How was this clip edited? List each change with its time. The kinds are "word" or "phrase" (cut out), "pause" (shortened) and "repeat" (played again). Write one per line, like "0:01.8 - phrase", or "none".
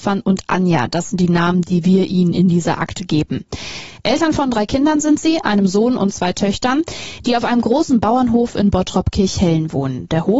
none